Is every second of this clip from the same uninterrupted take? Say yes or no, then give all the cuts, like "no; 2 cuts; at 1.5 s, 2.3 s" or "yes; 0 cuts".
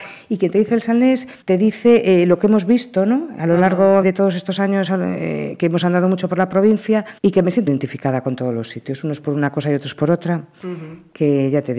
no; 4 cuts; at 1.4 s, 4.0 s, 7.2 s, 7.7 s